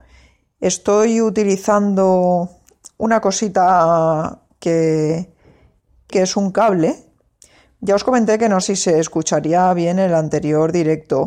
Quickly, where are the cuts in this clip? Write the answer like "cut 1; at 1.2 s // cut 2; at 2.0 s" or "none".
cut 1; at 4.5 s // cut 2; at 6.1 s // cut 3; at 8.6 s